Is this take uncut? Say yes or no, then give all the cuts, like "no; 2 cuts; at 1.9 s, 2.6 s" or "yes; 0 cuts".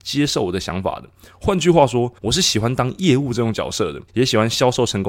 no; 2 cuts; at 2.2 s, 4.1 s